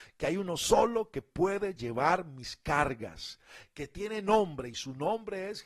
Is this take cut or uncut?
uncut